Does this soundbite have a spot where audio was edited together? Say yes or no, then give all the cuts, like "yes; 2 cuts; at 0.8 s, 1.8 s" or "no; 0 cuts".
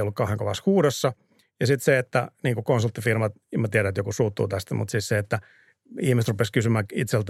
no; 0 cuts